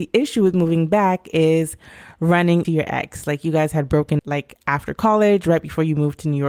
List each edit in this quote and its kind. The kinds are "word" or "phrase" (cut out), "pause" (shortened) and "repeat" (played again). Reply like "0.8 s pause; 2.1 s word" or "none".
2.6 s word; 4.2 s word